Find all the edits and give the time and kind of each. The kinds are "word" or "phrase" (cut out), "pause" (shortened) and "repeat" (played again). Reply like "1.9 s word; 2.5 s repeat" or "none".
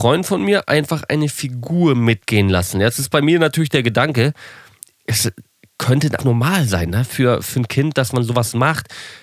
6.2 s word